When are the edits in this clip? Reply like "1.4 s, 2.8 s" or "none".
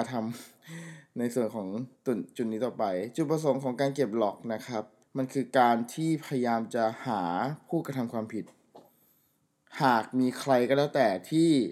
1.9 s, 5.0 s